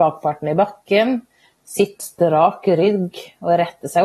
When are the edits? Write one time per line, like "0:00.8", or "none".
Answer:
0:02.0